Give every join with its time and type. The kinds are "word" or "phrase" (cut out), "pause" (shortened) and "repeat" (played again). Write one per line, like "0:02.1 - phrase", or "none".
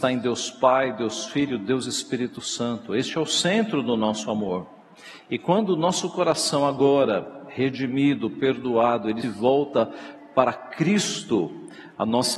0:09.2 - word

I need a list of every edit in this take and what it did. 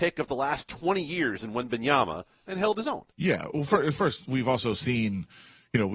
0:03.1 - pause

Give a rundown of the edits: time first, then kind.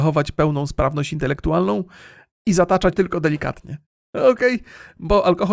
0:02.9 - word

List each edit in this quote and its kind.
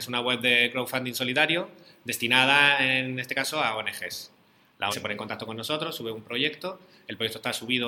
0:04.9 - word

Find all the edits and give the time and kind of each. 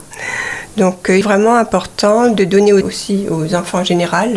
0:01.2 - phrase
0:02.8 - phrase

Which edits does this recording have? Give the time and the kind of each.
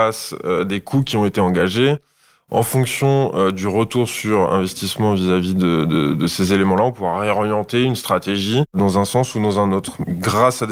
none

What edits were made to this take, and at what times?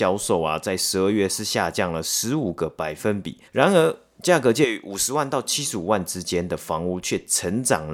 0:03.5 - pause

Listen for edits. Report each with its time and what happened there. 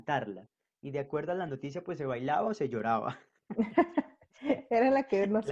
none

